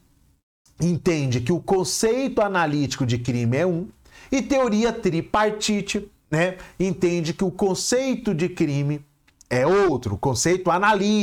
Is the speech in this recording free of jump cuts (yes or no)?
no